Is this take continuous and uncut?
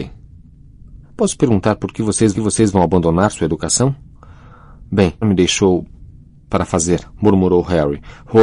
no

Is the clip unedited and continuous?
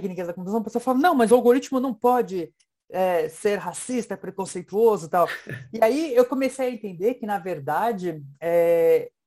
yes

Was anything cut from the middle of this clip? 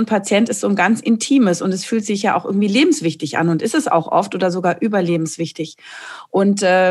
no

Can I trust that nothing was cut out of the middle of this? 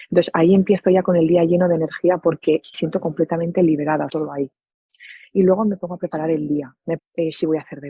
no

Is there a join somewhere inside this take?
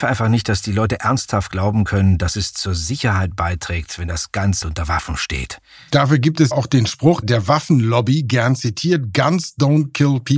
yes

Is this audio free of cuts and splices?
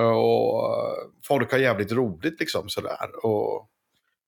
no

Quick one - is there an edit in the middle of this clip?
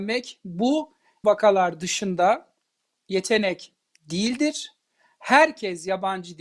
yes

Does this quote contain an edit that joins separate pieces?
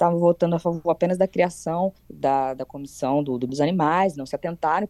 yes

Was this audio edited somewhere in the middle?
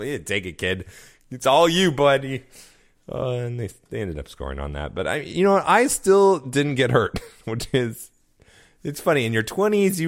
no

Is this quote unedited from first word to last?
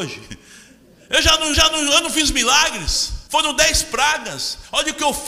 no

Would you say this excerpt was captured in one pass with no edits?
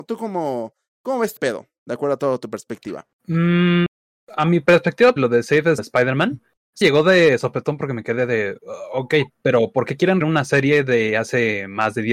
no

